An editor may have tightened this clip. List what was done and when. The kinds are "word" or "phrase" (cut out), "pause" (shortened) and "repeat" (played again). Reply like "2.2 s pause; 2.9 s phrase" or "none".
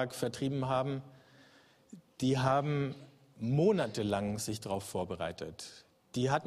none